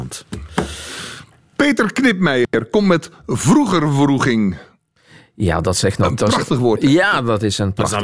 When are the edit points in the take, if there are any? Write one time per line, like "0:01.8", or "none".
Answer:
none

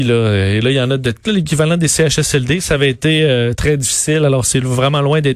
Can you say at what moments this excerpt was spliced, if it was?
0:01.2

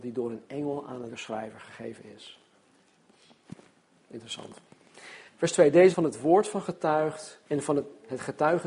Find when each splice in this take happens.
0:01.1
0:05.3
0:05.9
0:06.6
0:07.5

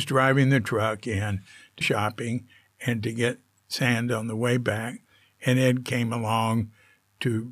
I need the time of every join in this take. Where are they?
0:01.8

